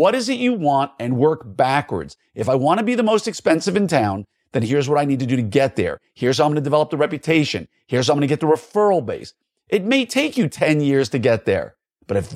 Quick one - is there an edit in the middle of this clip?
no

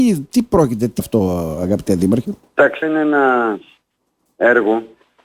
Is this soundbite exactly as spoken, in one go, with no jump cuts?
no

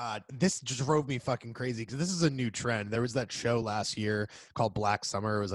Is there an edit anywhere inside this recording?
no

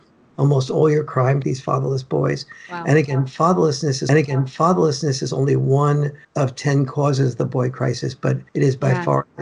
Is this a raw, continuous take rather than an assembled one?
no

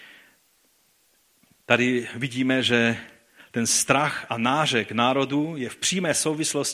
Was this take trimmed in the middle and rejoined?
no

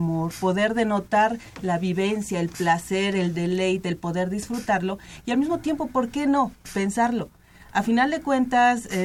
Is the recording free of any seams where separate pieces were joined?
yes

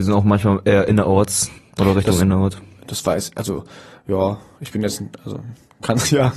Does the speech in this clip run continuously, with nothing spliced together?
no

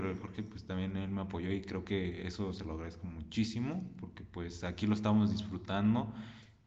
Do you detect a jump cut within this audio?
no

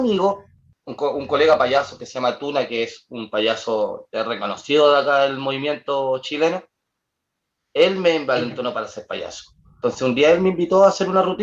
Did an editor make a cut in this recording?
no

